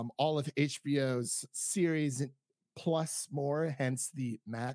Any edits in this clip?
no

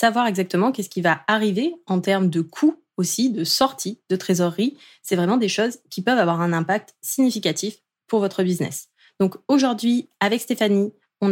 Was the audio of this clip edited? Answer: no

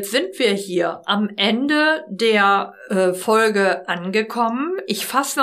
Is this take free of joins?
yes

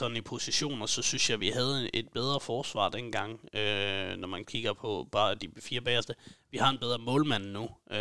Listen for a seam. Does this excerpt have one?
no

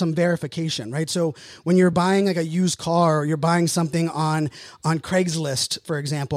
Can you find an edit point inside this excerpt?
no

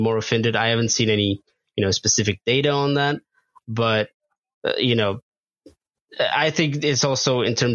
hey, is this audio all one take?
yes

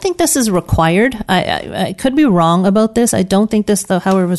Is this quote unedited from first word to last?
yes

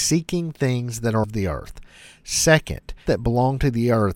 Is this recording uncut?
no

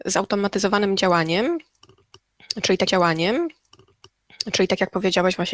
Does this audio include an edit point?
yes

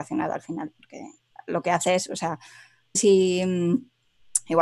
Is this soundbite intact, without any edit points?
no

